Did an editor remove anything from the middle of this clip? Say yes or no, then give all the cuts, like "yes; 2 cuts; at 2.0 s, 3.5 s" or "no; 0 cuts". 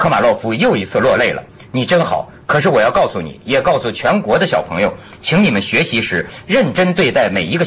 no; 0 cuts